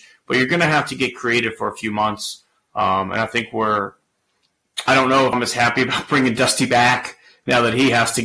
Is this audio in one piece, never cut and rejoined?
no; 2 cuts; at 4.9 s, 5.3 s

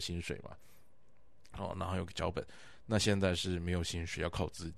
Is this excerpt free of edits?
yes; 0 cuts

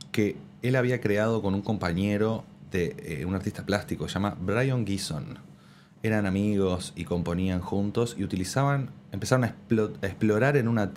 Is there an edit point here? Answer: no; 0 cuts

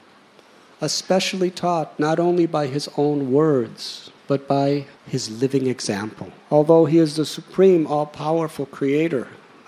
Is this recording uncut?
no; 3 cuts; at 4.2 s, 5.0 s, 6.4 s

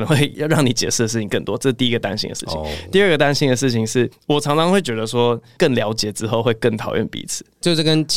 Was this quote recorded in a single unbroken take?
yes; 0 cuts

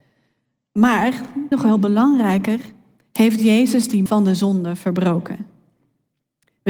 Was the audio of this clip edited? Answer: yes; 2 cuts; at 1.5 s, 4.1 s

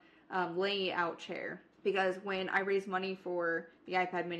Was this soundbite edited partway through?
yes; 1 cut; at 1.7 s

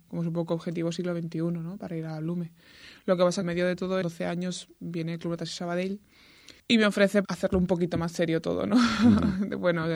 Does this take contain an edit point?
yes; 4 cuts; at 3.4 s, 4.0 s, 6.6 s, 7.2 s

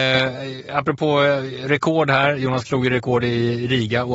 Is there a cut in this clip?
yes; 1 cut; at 2.6 s

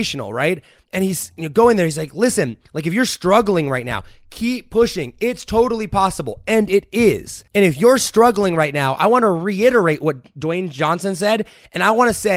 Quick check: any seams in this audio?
yes; 1 cut; at 7.5 s

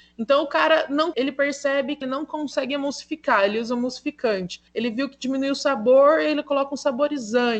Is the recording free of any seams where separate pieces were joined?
no; 3 cuts; at 1.1 s, 2.0 s, 4.7 s

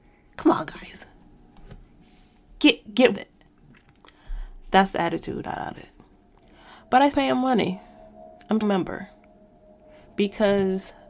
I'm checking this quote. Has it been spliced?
yes; 5 cuts; at 3.1 s, 5.4 s, 5.8 s, 7.1 s, 8.6 s

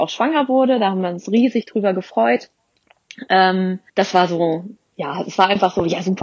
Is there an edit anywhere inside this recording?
yes; 1 cut; at 3.9 s

